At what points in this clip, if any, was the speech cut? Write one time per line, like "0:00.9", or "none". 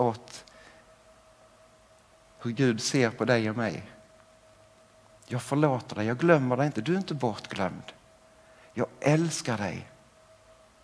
none